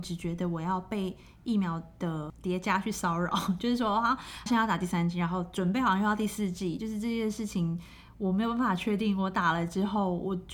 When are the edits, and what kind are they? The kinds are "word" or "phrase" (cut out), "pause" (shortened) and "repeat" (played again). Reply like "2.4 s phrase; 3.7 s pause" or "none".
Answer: 4.5 s word